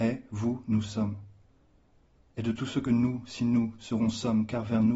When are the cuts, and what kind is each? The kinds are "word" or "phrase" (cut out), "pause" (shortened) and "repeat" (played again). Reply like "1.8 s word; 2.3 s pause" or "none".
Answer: none